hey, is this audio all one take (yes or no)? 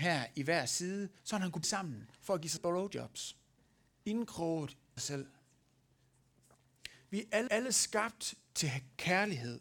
no